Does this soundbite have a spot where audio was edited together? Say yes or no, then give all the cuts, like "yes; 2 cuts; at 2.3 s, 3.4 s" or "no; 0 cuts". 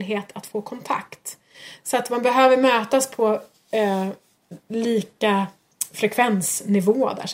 yes; 1 cut; at 4.6 s